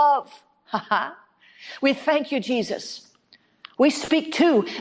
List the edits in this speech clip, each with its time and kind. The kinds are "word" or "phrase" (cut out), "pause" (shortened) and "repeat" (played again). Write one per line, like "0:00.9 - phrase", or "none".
none